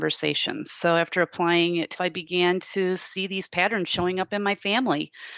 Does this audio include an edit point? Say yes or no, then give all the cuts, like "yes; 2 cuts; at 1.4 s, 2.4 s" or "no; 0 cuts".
yes; 1 cut; at 1.9 s